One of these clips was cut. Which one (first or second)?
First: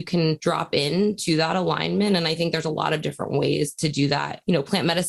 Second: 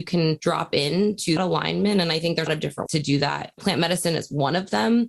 second